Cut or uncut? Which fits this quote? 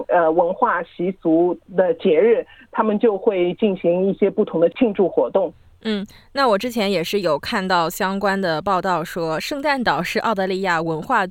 uncut